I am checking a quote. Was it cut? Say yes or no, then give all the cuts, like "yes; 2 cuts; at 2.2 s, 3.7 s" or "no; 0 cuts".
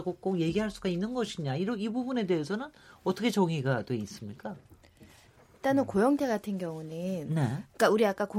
no; 0 cuts